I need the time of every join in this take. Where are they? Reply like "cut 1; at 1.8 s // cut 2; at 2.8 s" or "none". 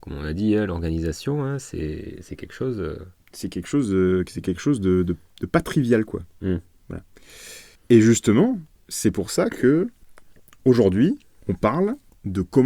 none